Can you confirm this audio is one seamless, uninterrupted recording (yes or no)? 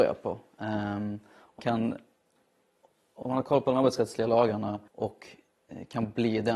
no